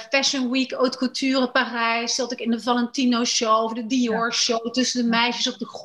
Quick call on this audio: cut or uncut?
uncut